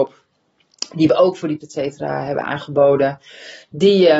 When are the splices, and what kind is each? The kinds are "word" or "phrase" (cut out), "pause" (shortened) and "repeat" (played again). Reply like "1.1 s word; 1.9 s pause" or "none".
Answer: 1.6 s word

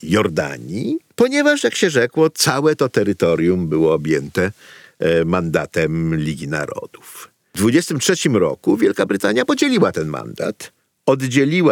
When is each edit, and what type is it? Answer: none

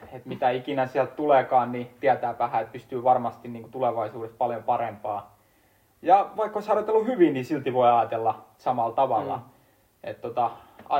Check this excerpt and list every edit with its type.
none

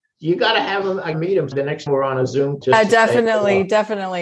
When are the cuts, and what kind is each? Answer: 1.1 s word; 1.5 s word; 1.9 s word; 2.6 s word

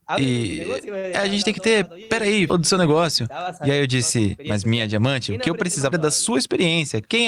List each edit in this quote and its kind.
2.5 s word; 5.9 s word

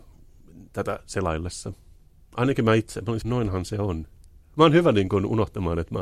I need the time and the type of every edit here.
3.2 s word

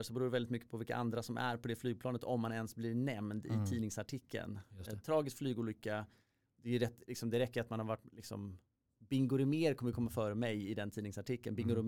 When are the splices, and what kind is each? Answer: none

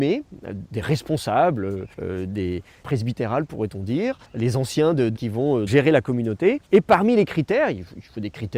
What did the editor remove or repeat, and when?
1.9 s pause; 2.8 s phrase; 4.2 s pause; 5.1 s word; 5.7 s word; 6.7 s pause

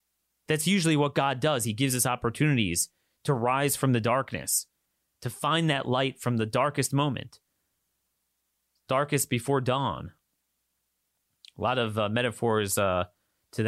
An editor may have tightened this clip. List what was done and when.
none

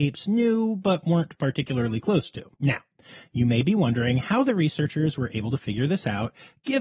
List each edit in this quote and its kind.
2.5 s pause

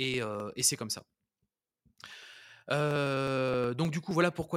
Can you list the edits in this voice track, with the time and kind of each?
none

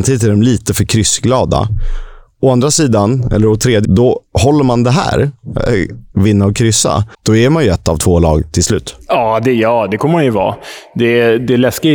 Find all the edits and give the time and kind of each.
3.8 s word; 7.1 s pause

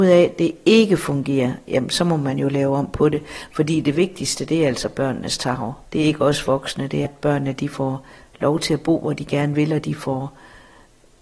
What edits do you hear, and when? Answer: 5.9 s pause; 7.0 s word

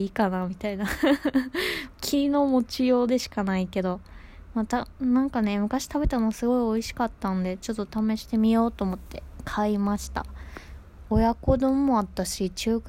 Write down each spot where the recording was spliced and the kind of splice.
1.9 s phrase

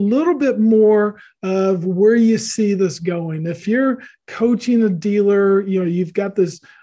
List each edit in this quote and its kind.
3.6 s word

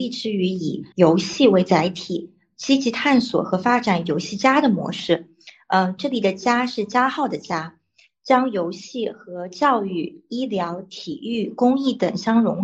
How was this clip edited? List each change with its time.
0.9 s pause

